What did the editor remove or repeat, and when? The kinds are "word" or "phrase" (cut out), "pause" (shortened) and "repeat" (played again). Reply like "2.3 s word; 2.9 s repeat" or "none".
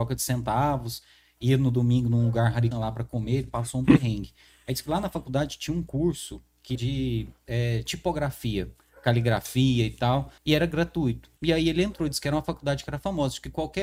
2.7 s word; 6.8 s word; 10.4 s pause; 11.4 s pause